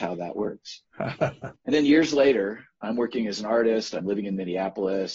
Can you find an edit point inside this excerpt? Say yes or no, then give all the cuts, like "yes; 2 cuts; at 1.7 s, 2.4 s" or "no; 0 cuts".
yes; 1 cut; at 1.6 s